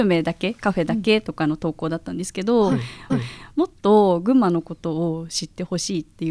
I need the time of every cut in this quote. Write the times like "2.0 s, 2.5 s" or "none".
3.1 s